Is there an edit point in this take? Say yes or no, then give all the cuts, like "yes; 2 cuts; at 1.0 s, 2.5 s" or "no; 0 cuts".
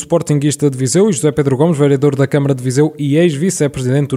no; 0 cuts